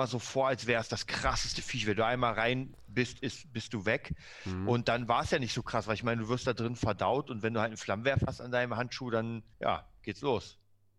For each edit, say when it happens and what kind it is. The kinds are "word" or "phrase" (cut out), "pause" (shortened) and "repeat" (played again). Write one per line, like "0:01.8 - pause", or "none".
0:09.5 - pause